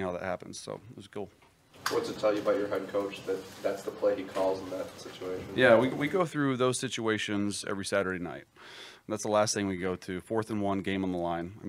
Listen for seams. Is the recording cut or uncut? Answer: uncut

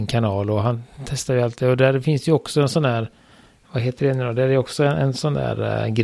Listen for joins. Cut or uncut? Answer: uncut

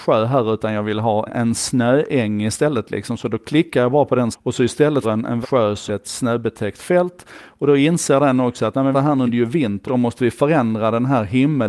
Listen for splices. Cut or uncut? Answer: cut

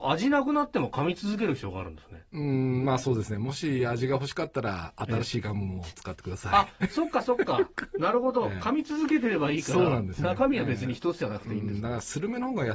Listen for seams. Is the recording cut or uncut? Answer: cut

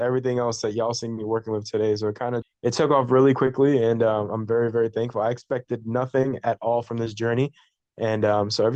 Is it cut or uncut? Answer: cut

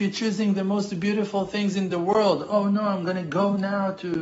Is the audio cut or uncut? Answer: uncut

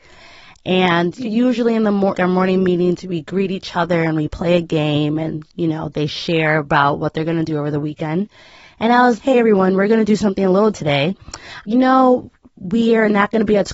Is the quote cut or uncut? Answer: cut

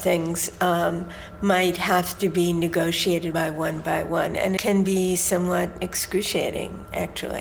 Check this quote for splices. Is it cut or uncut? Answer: cut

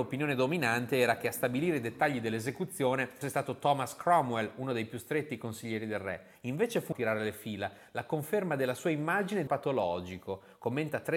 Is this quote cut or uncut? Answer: cut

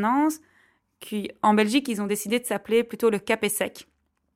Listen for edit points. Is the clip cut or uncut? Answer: uncut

